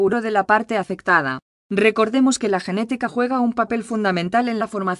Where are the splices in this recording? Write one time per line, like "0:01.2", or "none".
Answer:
none